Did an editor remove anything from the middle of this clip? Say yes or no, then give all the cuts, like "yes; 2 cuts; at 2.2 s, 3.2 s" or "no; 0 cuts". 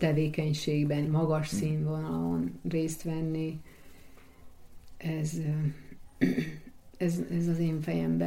yes; 1 cut; at 1.1 s